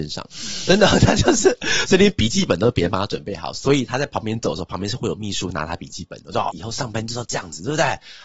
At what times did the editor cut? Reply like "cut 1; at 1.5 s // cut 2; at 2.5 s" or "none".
cut 1; at 6.5 s